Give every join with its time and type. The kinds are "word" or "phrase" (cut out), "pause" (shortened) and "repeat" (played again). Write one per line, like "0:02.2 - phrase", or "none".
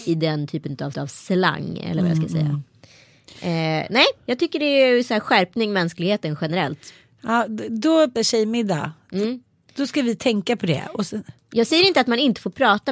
0:00.9 - repeat
0:08.1 - word